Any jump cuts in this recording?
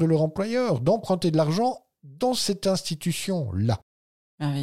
no; 0 cuts

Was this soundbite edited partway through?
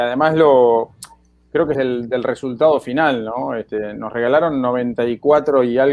yes; 1 cut; at 1.7 s

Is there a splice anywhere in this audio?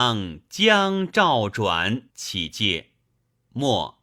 yes; 1 cut; at 2.1 s

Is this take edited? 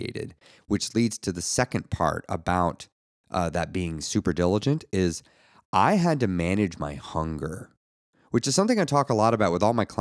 no; 0 cuts

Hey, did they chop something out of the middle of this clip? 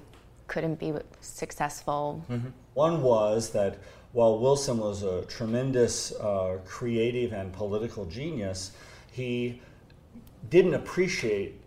no; 0 cuts

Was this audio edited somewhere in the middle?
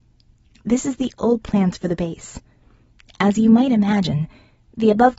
no; 0 cuts

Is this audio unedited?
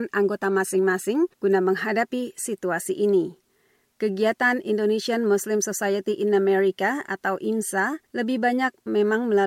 no; 2 cuts; at 1.3 s, 8.0 s

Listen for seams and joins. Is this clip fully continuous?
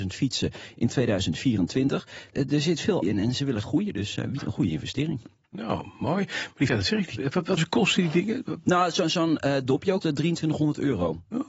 no; 7 cuts; at 3.0 s, 3.6 s, 4.4 s, 6.7 s, 7.2 s, 7.6 s, 10.0 s

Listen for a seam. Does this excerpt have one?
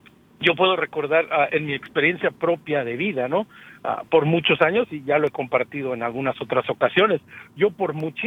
no; 0 cuts

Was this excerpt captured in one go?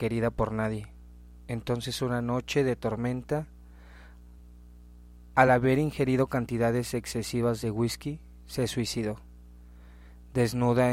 yes; 0 cuts

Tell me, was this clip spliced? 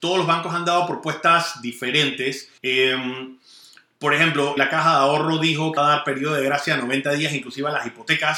yes; 3 cuts; at 2.6 s, 4.6 s, 5.8 s

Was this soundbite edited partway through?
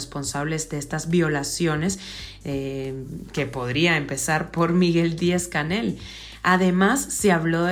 no; 0 cuts

